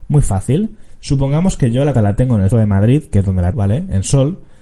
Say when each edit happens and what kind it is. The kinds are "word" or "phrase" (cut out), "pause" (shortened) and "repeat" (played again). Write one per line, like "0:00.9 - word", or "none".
0:01.9 - word
0:02.5 - word
0:03.5 - word